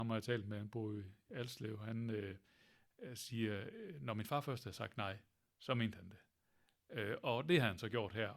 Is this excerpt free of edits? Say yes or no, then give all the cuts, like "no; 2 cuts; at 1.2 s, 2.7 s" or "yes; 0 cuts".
yes; 0 cuts